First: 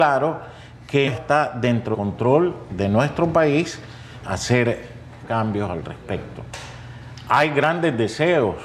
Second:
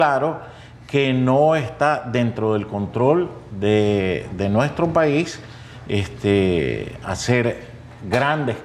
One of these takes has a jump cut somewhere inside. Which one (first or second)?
first